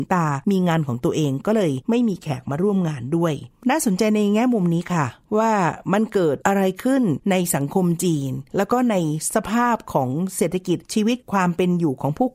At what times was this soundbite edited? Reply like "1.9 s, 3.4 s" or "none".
3.5 s